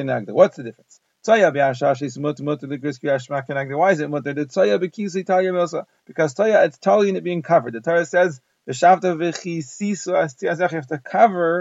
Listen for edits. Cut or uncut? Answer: cut